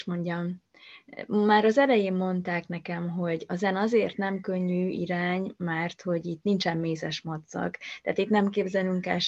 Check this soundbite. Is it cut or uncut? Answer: uncut